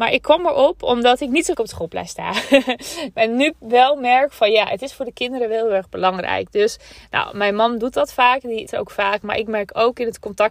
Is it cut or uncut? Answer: cut